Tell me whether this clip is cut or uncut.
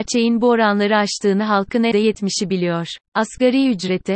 cut